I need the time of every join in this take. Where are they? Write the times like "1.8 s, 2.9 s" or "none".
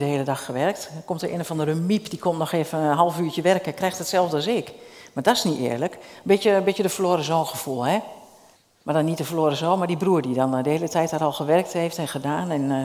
8.5 s